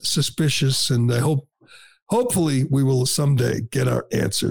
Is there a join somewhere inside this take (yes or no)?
no